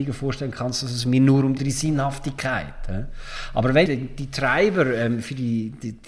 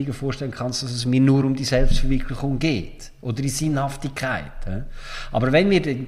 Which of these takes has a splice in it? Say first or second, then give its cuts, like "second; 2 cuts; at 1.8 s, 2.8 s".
first; 2 cuts; at 1.6 s, 3.9 s